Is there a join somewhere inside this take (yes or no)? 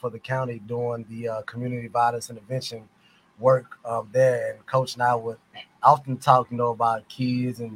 no